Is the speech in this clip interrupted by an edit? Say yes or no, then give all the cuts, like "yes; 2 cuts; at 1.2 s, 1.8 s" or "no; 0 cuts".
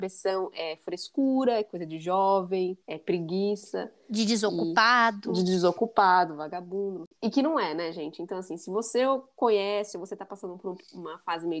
yes; 2 cuts; at 2.8 s, 7.2 s